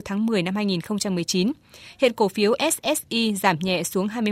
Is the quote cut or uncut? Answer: uncut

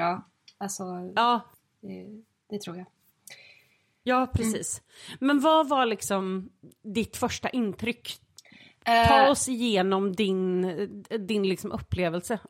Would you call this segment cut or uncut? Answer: uncut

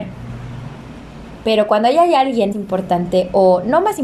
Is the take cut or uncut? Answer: cut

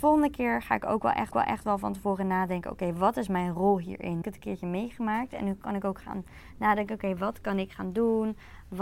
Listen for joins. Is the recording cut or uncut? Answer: cut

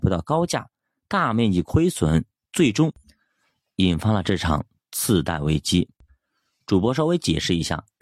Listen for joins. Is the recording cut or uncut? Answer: uncut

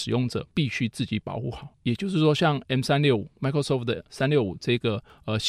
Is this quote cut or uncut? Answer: cut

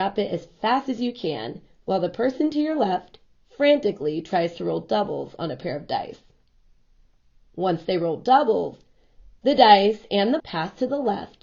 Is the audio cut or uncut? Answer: cut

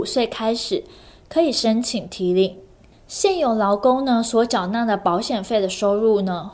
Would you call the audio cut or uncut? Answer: uncut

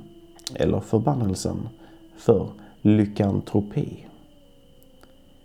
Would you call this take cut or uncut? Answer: uncut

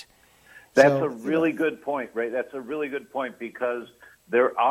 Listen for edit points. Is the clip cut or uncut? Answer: uncut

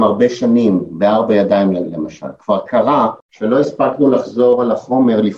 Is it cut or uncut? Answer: cut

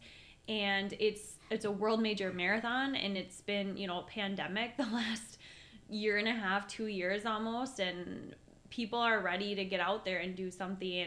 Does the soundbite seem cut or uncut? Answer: uncut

